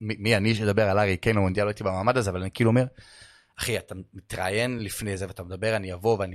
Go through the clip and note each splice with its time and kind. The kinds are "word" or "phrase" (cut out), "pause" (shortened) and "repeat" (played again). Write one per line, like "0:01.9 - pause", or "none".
none